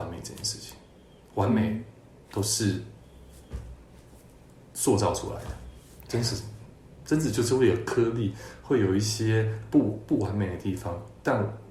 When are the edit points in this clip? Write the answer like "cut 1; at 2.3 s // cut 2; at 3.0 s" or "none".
none